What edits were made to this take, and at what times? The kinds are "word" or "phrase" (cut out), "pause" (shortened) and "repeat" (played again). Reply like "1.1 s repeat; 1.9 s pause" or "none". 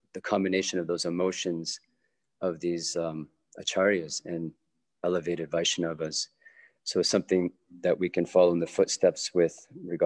none